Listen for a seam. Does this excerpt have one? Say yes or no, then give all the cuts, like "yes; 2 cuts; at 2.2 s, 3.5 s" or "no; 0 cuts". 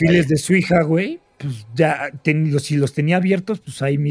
no; 0 cuts